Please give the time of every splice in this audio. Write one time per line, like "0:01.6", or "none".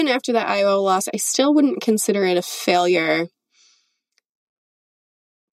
none